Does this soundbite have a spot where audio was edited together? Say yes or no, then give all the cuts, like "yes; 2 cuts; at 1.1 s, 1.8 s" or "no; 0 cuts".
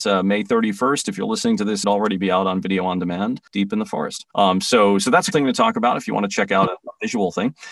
yes; 4 cuts; at 1.8 s, 3.5 s, 4.3 s, 5.3 s